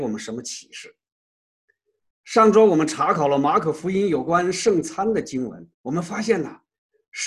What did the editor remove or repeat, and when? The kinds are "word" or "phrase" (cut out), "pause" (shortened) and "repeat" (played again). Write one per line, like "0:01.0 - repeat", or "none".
0:05.7 - pause